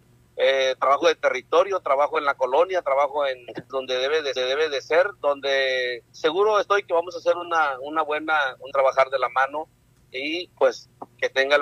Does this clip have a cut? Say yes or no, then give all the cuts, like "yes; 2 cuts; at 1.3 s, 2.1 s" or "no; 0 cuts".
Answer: yes; 4 cuts; at 3.7 s, 4.4 s, 6.1 s, 8.7 s